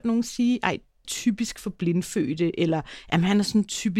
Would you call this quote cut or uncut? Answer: cut